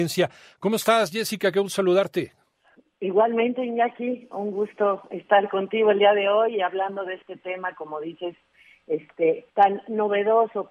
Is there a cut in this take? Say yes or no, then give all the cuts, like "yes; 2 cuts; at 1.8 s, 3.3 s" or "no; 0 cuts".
yes; 1 cut; at 9.5 s